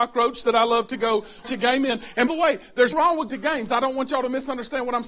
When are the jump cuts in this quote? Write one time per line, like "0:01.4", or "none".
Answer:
0:01.4
0:02.3
0:02.9
0:03.3